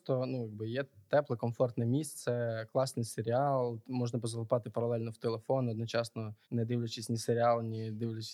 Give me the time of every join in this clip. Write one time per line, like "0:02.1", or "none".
0:06.4